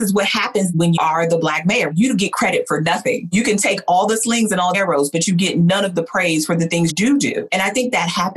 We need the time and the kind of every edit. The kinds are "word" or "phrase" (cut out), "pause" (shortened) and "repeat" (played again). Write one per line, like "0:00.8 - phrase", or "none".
0:01.0 - word
0:04.7 - word
0:06.9 - word